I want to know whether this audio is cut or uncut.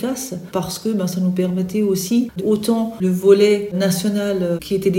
cut